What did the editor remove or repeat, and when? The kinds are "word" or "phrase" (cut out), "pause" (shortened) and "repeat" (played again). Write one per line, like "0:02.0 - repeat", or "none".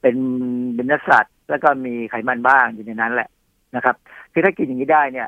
0:01.4 - pause
0:03.4 - pause